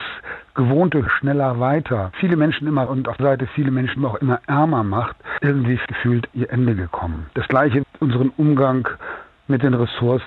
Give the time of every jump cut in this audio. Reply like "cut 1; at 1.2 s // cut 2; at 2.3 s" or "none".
cut 1; at 1.1 s // cut 2; at 2.1 s // cut 3; at 2.9 s // cut 4; at 3.2 s // cut 5; at 4.0 s // cut 6; at 5.4 s // cut 7; at 5.9 s // cut 8; at 6.3 s // cut 9; at 7.8 s